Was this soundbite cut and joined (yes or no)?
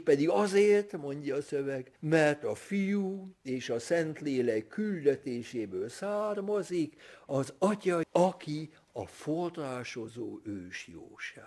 yes